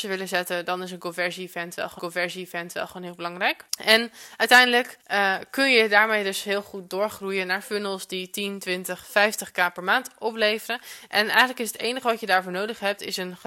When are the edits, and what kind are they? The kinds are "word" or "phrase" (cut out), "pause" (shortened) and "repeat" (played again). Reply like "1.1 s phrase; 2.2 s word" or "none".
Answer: 2.0 s repeat; 3.7 s pause; 5.0 s pause